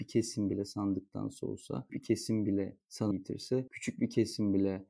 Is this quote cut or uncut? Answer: cut